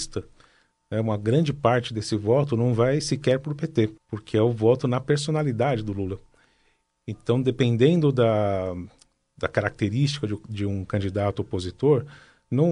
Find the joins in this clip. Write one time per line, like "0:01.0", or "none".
0:04.0